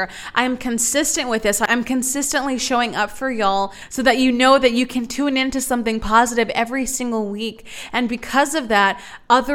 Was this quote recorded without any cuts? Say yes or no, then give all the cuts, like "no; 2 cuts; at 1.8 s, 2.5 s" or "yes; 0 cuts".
yes; 0 cuts